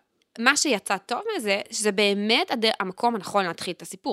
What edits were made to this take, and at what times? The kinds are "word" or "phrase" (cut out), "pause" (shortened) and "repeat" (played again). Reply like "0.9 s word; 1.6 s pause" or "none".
none

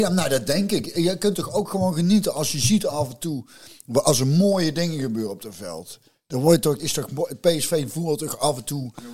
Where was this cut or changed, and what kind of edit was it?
6.8 s word

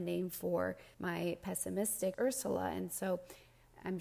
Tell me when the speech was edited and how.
0.9 s pause; 2.1 s phrase

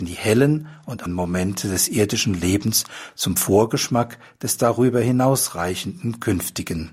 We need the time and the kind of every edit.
1.1 s word

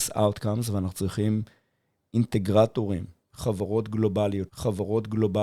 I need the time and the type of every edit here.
4.5 s repeat

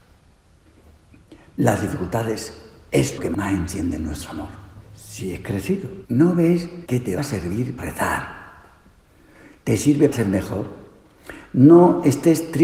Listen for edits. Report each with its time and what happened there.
3.2 s word; 4.8 s pause; 6.0 s pause; 6.8 s pause; 7.2 s word; 7.8 s word; 10.1 s word

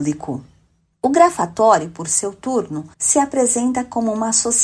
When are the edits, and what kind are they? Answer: 2.9 s pause

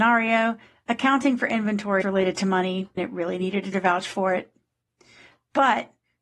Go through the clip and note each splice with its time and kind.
2.0 s word; 3.0 s word; 3.7 s word

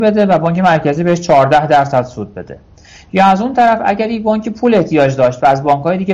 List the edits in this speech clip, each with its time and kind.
none

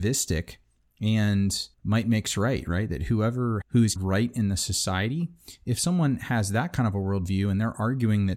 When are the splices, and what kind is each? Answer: 1.7 s pause; 3.6 s phrase; 4.0 s word

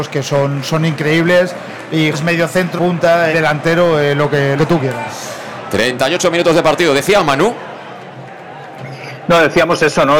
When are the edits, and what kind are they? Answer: 2.1 s word; 2.8 s word; 3.3 s word; 4.6 s word

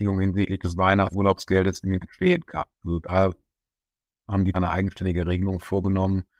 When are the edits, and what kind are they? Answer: 1.1 s word; 2.0 s word; 2.7 s pause; 4.5 s word

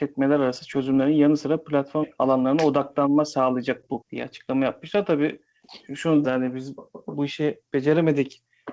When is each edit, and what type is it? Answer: 2.0 s phrase; 4.0 s word; 6.2 s word

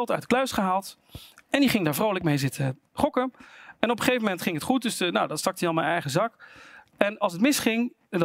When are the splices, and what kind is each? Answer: none

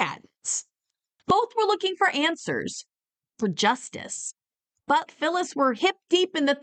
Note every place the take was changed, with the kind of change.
5.1 s word

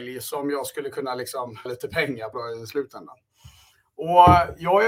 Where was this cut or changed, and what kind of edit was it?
1.7 s word; 2.3 s word

